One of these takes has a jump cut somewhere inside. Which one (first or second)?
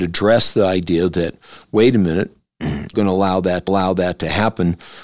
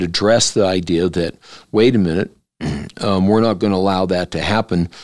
first